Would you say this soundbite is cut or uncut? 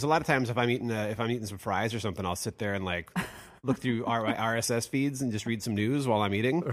uncut